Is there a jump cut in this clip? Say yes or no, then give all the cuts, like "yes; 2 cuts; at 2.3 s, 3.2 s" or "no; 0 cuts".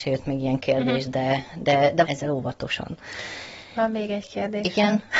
yes; 1 cut; at 2.1 s